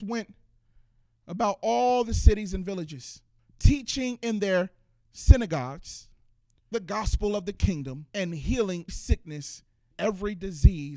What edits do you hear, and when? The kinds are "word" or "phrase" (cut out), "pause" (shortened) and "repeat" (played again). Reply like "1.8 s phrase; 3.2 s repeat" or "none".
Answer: 3.4 s pause; 6.7 s word; 8.1 s pause; 8.9 s word; 9.9 s word